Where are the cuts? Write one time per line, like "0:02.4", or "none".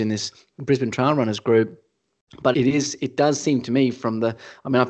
0:02.5